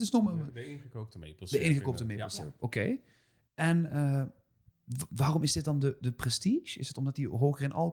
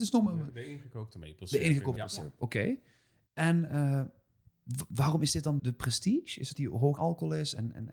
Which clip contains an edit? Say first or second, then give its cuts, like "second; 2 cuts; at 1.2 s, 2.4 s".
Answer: second; 4 cuts; at 2.0 s, 5.6 s, 6.5 s, 7.0 s